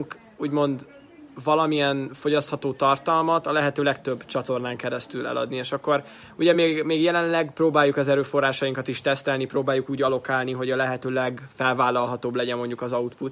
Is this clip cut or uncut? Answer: uncut